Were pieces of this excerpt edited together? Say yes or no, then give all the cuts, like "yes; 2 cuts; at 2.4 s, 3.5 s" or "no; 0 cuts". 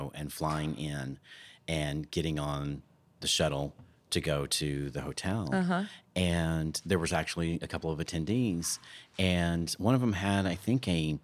no; 0 cuts